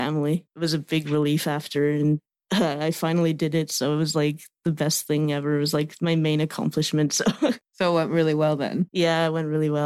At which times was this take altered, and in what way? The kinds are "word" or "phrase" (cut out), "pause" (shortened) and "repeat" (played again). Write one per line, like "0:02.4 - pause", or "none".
none